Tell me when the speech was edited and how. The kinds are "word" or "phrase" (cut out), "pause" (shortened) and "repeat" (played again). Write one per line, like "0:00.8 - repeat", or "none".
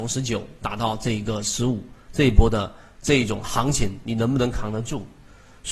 none

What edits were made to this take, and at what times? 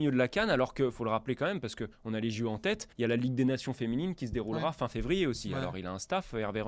0:01.9 - pause
0:02.9 - pause

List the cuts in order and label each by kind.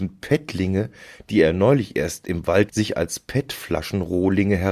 0:02.7 - phrase

